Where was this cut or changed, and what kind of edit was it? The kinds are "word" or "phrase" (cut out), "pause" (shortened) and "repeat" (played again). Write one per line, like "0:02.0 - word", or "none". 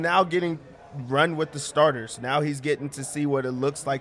none